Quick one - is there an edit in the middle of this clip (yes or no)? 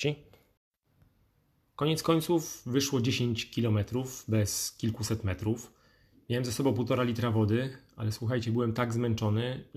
no